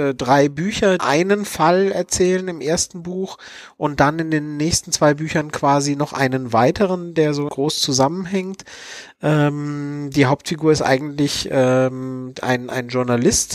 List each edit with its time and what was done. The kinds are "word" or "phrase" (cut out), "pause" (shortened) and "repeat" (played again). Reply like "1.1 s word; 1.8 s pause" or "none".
1.0 s phrase; 7.5 s word